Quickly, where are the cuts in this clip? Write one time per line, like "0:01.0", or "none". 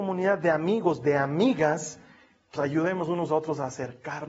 0:02.6